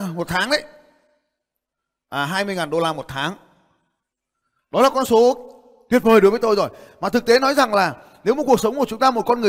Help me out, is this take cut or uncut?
uncut